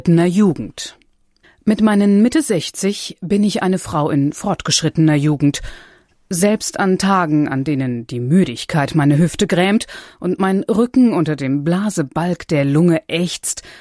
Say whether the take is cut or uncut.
uncut